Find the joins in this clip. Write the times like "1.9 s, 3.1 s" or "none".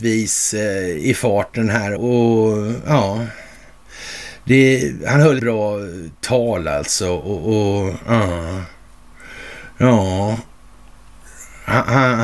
2.0 s, 5.4 s